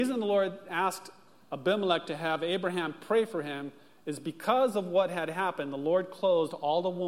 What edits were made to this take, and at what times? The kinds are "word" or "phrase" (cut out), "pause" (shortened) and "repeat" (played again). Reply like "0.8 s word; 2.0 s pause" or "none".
none